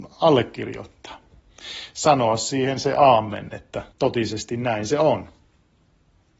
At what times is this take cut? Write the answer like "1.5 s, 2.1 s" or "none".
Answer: 3.9 s